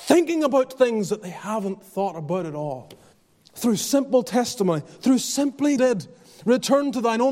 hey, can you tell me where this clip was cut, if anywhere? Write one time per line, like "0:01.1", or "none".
0:03.1
0:05.8

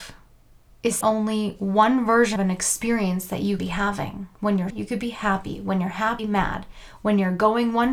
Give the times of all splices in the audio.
0:01.0
0:02.4
0:03.6
0:04.3
0:04.7
0:06.2

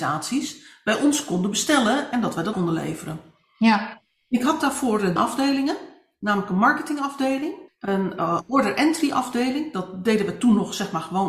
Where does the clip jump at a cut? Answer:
0:02.5
0:05.2
0:07.7

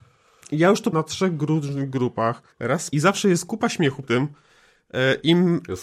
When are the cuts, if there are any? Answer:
0:00.9
0:02.5
0:02.9
0:04.0

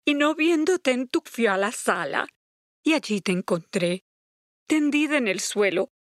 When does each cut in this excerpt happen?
0:01.3

